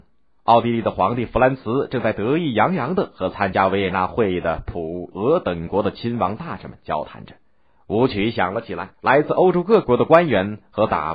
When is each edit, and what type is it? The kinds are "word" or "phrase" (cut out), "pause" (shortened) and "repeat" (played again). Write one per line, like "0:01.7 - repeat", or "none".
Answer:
0:05.1 - word
0:07.7 - pause
0:08.9 - pause

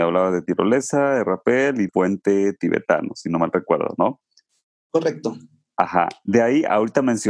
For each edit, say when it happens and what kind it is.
0:01.9 - word

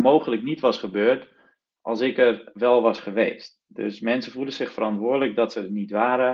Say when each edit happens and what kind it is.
none

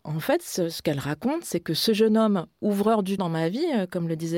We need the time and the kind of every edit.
0:03.2 - word

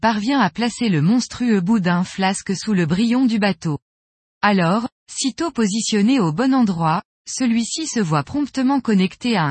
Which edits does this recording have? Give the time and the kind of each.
none

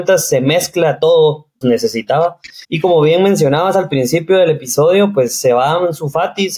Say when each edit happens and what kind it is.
0:01.6 - phrase
0:02.6 - pause

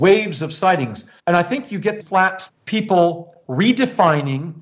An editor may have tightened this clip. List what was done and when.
0:01.2 - pause
0:02.0 - word
0:02.5 - phrase

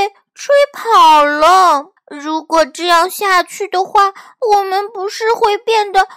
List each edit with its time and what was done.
0:02.0 - pause

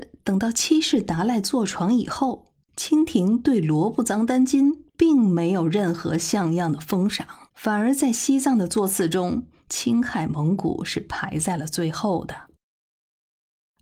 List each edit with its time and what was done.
0:02.6 - pause
0:07.5 - pause

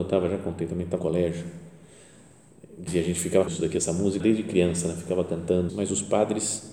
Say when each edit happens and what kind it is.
0:01.0 - word
0:02.9 - word
0:03.5 - word
0:04.2 - word
0:05.7 - word

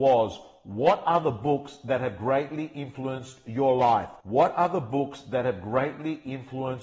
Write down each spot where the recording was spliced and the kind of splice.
0:04.2 - pause

